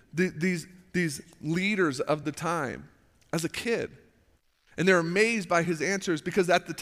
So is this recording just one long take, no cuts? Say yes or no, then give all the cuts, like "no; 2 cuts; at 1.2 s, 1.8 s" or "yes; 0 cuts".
yes; 0 cuts